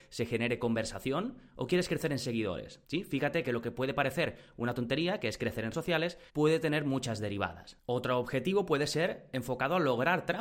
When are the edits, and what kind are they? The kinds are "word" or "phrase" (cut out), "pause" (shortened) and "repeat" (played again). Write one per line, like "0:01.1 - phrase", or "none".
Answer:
0:02.8 - pause
0:05.7 - word
0:06.3 - pause